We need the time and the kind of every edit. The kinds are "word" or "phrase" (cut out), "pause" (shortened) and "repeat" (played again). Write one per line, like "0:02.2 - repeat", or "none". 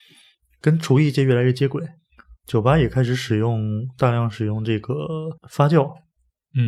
0:05.4 - pause